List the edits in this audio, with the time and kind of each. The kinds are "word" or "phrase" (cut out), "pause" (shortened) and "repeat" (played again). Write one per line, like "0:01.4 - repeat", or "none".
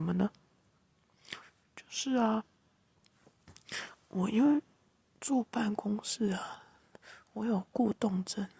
none